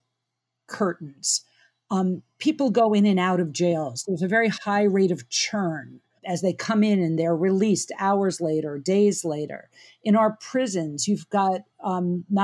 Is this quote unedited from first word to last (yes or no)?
no